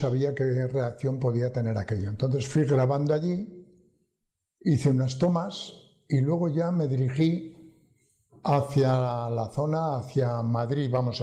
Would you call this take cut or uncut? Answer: uncut